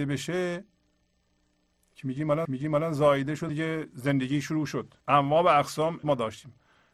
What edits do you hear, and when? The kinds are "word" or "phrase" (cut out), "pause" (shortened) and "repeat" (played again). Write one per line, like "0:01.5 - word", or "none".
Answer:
0:02.4 - repeat
0:03.5 - word
0:05.0 - pause
0:06.0 - word